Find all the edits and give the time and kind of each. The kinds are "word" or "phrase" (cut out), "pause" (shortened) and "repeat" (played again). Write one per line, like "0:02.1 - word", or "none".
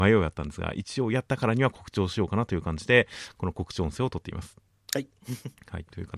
0:04.7 - pause